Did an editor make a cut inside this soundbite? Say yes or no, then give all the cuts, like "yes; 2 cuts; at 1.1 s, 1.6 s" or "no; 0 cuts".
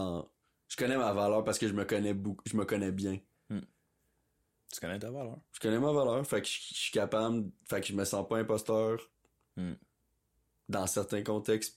no; 0 cuts